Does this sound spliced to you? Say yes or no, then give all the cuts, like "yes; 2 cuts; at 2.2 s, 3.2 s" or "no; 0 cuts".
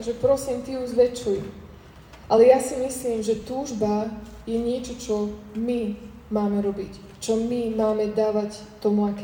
no; 0 cuts